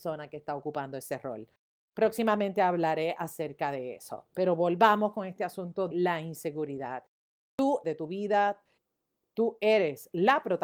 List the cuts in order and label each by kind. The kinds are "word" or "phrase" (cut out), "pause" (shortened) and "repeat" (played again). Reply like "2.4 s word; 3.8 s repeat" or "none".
5.9 s word; 7.8 s phrase